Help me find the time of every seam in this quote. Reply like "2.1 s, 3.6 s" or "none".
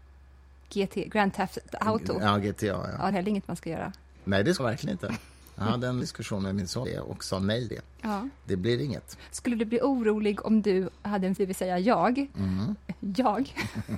3.1 s, 4.6 s, 6.0 s, 6.8 s, 7.7 s, 11.4 s